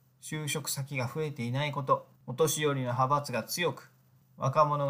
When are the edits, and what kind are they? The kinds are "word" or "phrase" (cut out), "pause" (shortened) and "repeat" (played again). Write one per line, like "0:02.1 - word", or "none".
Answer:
0:02.2 - pause